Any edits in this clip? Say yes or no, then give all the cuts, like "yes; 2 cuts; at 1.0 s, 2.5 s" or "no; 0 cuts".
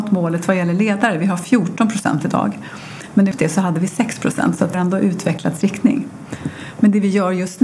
yes; 3 cuts; at 3.3 s, 4.7 s, 5.6 s